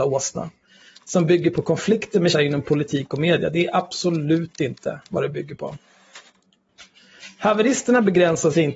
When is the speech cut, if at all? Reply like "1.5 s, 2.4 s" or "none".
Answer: 2.3 s